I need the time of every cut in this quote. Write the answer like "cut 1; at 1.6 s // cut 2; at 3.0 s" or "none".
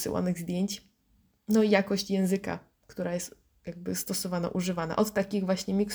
none